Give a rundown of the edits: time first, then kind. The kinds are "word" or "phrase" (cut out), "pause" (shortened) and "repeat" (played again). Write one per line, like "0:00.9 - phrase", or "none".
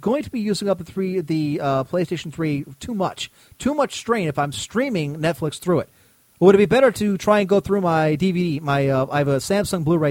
none